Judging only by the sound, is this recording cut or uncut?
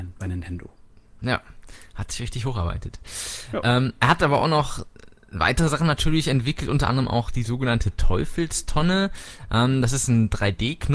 uncut